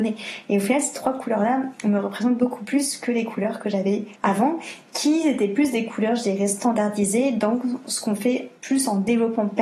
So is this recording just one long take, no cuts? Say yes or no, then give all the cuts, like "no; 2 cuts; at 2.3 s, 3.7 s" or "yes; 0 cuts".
no; 2 cuts; at 4.2 s, 8.6 s